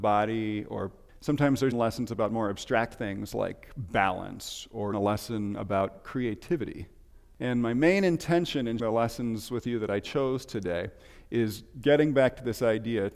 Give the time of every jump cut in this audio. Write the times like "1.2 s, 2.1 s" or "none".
1.7 s, 4.9 s, 8.8 s